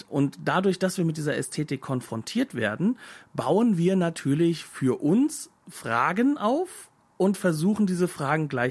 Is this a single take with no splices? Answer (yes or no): no